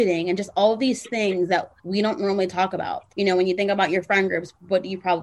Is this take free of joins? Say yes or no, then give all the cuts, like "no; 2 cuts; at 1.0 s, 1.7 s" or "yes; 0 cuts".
no; 2 cuts; at 1.8 s, 3.1 s